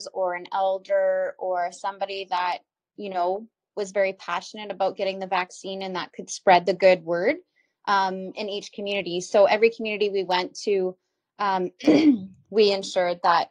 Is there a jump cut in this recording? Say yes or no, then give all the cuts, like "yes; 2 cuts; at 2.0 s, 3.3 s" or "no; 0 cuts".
no; 0 cuts